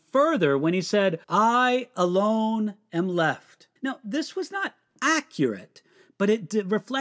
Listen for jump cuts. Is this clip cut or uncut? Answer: cut